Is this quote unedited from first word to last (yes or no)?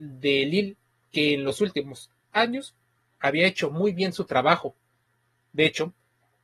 no